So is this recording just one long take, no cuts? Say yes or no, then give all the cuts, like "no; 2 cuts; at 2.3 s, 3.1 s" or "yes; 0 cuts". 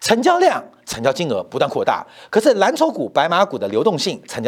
yes; 0 cuts